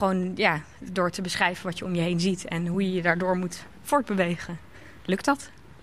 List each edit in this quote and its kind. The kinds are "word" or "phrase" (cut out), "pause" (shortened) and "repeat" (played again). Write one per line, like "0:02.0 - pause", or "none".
none

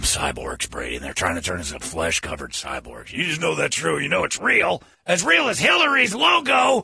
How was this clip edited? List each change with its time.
0:04.9 - pause

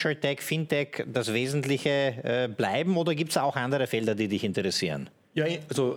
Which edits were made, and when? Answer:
none

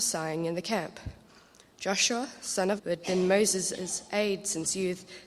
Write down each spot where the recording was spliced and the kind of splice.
0:02.8 - word

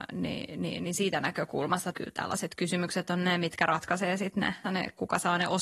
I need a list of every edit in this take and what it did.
0:01.9 - phrase
0:04.6 - word

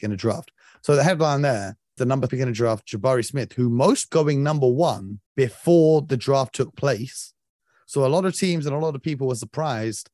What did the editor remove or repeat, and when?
0:02.0 - word
0:02.3 - word
0:04.1 - phrase
0:05.3 - pause

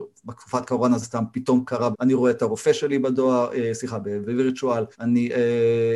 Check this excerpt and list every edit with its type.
0:01.0 - phrase
0:01.9 - word
0:04.9 - pause

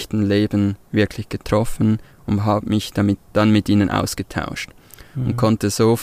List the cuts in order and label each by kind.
0:03.2 - pause

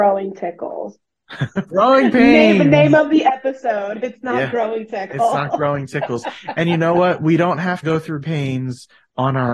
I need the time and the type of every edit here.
0:01.7 - word
0:07.8 - word
0:08.2 - word

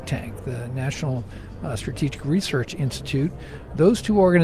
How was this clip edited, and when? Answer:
none

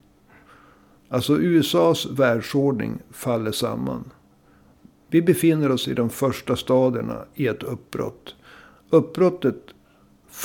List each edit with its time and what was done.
none

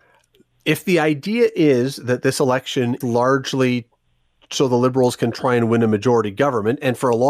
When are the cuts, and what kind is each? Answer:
0:03.0 - word

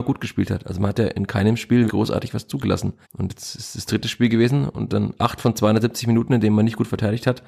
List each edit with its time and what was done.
0:01.9 - word
0:03.0 - pause
0:05.2 - word

